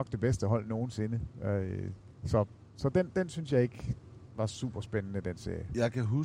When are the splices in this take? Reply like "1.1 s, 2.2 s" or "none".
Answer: 2.1 s